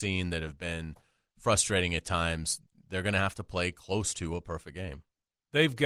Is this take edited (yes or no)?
no